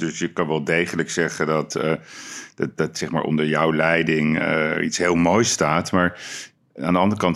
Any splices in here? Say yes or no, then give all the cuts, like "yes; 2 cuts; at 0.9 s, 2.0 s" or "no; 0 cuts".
no; 0 cuts